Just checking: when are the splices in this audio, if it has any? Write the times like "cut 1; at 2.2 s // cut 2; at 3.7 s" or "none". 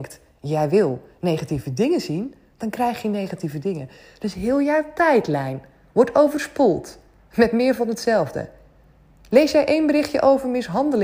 none